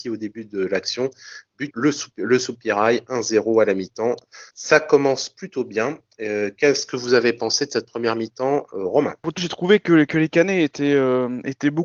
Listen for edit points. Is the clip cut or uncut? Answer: cut